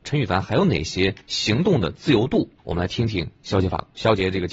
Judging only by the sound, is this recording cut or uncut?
cut